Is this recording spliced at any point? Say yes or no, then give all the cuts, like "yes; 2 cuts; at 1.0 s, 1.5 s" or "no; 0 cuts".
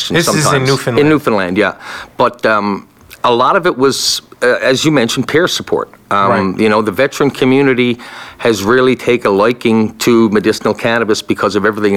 no; 0 cuts